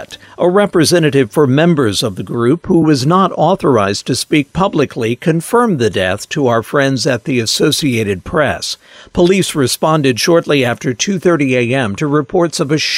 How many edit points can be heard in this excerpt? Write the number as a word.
zero